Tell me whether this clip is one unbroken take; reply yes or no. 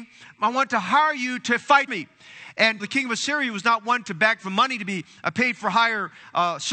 no